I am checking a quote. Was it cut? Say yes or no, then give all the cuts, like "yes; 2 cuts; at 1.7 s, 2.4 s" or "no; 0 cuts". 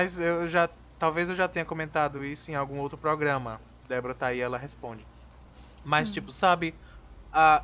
no; 0 cuts